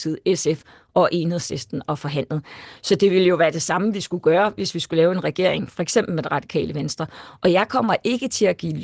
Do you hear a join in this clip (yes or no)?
no